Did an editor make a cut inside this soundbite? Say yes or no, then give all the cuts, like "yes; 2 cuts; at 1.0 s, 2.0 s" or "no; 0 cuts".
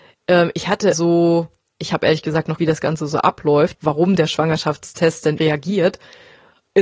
yes; 4 cuts; at 0.9 s, 2.6 s, 3.7 s, 5.4 s